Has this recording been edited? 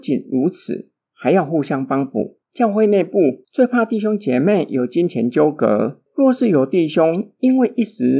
yes; 2 cuts; at 2.4 s, 6.1 s

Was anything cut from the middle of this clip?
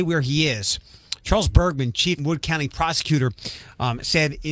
yes; 1 cut; at 2.2 s

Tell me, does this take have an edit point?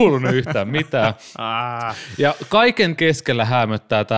yes; 1 cut; at 3.0 s

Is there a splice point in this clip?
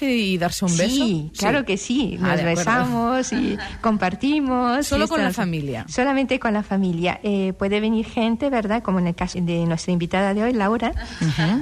yes; 1 cut; at 9.3 s

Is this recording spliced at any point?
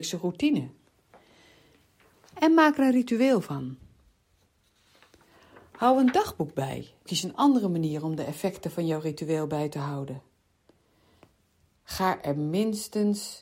yes; 1 cut; at 7.1 s

